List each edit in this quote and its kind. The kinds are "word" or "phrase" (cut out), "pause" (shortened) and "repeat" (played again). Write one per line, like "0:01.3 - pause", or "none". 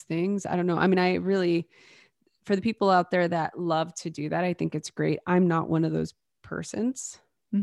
none

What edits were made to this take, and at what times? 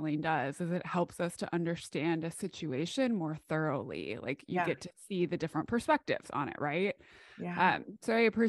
none

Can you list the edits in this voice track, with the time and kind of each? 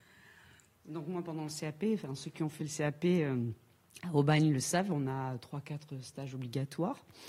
none

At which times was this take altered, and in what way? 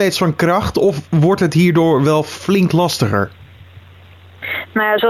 none

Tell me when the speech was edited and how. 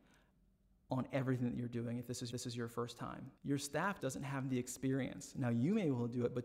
0:02.3 - repeat
0:03.4 - pause
0:04.0 - word

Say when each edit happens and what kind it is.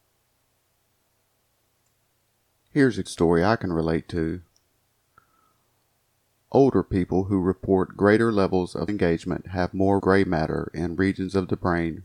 0:03.1 - word
0:08.9 - word
0:10.0 - word

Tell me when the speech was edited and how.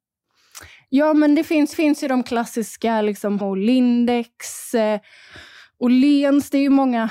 0:01.7 - repeat
0:03.4 - word

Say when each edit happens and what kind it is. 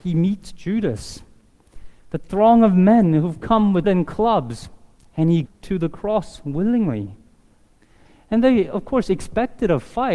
0:03.8 - word
0:05.5 - word

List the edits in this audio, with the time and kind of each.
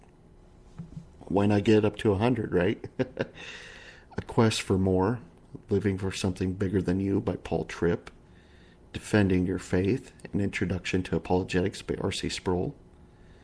0:04.1 - word

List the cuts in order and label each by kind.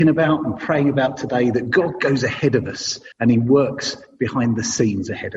0:03.1 - pause

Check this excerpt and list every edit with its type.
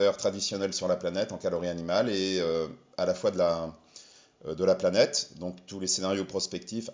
none

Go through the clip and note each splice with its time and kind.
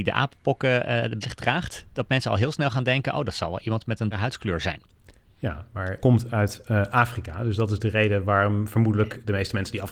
0:01.2 - word
0:04.1 - word
0:06.0 - word

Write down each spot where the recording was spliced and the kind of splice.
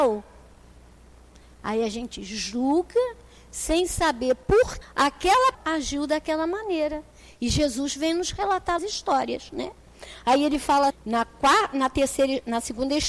0:04.8 - word
0:05.5 - word
0:08.8 - word
0:10.9 - word

